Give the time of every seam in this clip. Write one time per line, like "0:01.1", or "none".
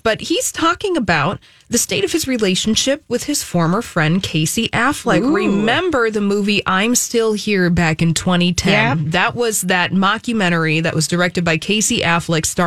none